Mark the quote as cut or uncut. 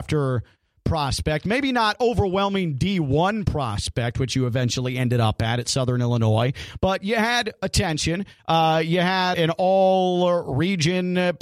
cut